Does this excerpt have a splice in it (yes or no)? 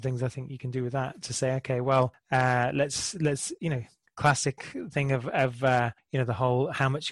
no